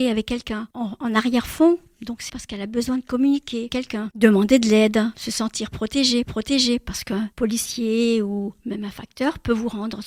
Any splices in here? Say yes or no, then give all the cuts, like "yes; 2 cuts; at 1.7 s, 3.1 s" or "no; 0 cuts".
yes; 4 cuts; at 2.3 s, 3.7 s, 6.2 s, 7.3 s